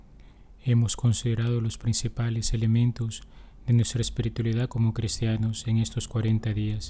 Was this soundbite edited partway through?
no; 0 cuts

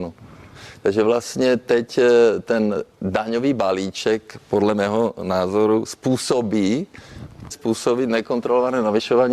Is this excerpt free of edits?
no; 1 cut; at 7.5 s

